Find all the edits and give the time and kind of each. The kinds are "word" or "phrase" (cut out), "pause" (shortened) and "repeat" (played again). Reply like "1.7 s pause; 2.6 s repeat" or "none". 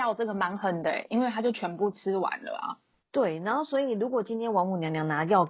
none